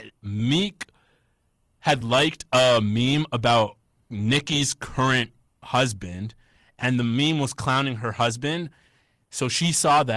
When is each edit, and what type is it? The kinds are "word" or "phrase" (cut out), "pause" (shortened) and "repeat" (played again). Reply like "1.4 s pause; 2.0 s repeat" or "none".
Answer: none